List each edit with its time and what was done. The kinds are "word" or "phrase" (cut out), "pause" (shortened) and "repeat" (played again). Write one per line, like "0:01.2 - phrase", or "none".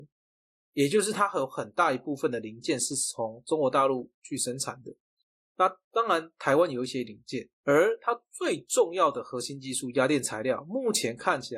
0:07.5 - pause